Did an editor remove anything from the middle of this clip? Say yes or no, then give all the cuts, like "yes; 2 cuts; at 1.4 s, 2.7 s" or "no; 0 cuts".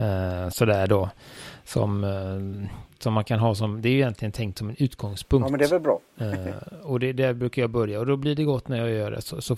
no; 0 cuts